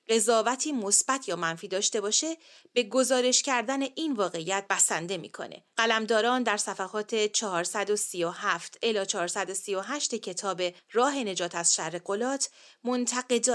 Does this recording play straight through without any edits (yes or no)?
yes